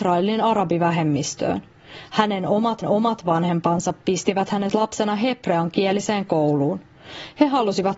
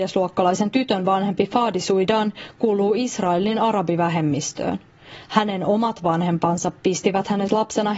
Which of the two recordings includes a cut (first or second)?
first